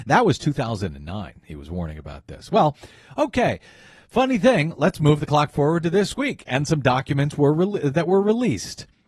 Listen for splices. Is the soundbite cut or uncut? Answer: uncut